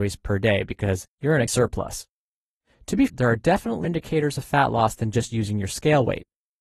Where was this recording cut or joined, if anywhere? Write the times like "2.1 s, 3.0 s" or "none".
1.5 s, 3.1 s, 3.8 s